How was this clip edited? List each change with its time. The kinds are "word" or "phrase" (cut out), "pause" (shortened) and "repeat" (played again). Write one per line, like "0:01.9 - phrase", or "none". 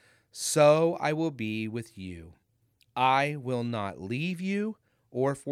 none